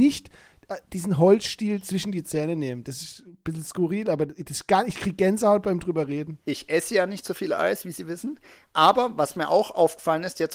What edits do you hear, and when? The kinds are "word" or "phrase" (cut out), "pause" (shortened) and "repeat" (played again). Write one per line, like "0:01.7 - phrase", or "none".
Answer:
0:06.4 - pause